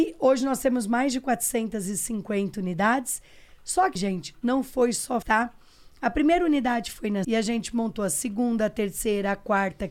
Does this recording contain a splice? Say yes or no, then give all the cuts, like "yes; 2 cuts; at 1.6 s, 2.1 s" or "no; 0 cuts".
yes; 3 cuts; at 4.0 s, 5.2 s, 7.2 s